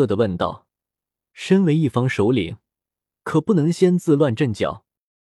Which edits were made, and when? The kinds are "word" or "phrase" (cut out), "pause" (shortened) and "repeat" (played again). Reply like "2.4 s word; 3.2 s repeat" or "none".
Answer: none